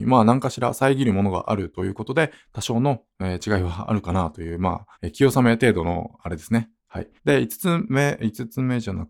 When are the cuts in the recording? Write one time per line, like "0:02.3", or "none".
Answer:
0:04.9
0:07.2